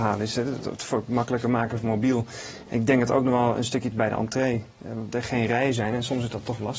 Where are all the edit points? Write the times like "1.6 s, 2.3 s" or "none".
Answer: 3.9 s, 4.7 s, 5.1 s